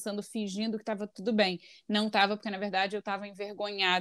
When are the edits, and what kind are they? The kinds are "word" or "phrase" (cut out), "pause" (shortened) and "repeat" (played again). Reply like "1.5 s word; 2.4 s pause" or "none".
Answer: none